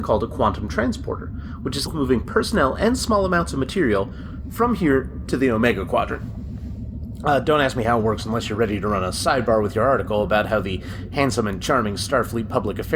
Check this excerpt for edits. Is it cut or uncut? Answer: cut